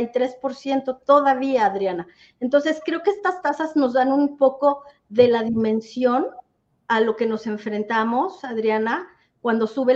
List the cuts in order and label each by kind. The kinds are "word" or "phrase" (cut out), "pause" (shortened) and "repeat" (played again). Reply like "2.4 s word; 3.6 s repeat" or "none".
none